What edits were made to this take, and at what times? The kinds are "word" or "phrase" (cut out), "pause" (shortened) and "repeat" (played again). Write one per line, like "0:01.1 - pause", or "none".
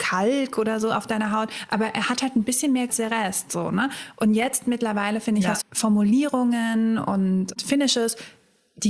0:02.9 - phrase
0:05.6 - phrase